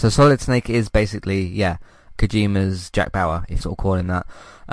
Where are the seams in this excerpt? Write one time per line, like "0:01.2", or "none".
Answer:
0:02.2
0:03.6